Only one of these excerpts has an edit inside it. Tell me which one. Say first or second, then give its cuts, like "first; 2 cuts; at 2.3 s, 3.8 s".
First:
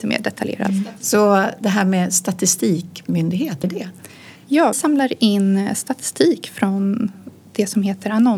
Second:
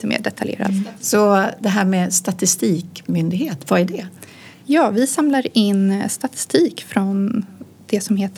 first; 2 cuts; at 3.6 s, 4.7 s